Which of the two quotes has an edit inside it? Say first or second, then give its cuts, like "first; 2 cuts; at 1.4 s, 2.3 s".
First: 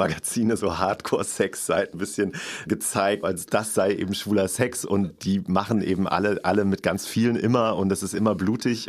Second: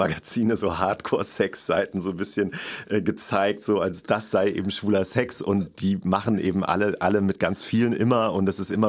first; 3 cuts; at 1.9 s, 2.7 s, 3.2 s